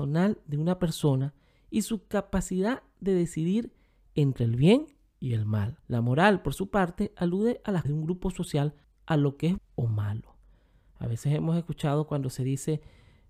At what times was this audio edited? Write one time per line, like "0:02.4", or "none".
0:05.8
0:07.8
0:08.8
0:09.6